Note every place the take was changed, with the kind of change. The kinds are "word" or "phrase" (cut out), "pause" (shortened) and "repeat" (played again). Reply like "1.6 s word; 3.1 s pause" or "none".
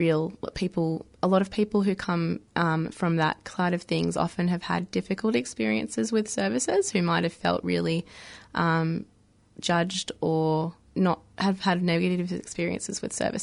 2.5 s pause